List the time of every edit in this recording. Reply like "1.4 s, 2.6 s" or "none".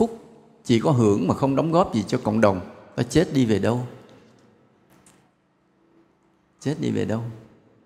none